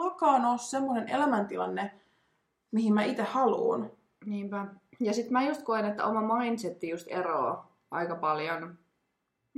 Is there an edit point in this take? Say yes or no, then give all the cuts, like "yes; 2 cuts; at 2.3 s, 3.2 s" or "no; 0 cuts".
no; 0 cuts